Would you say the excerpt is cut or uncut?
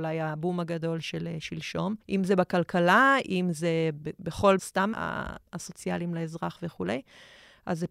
cut